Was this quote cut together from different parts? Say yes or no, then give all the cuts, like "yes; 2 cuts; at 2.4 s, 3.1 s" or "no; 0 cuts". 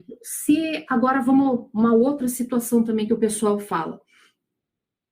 no; 0 cuts